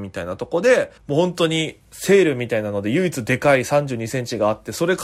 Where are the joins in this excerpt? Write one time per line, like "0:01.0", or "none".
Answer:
0:01.0